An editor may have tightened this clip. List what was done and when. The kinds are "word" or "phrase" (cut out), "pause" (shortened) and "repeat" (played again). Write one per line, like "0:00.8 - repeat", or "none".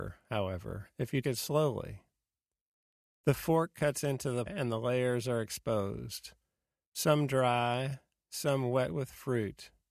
0:01.2 - word
0:04.5 - word